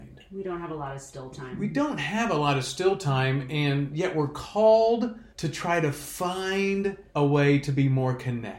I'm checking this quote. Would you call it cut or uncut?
cut